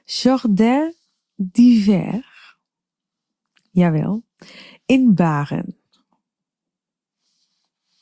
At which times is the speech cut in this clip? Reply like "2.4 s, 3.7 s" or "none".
none